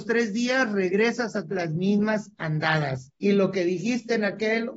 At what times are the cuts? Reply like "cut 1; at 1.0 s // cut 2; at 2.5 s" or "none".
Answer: cut 1; at 1.5 s